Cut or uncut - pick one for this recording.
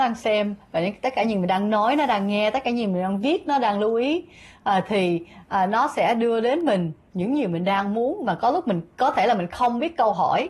uncut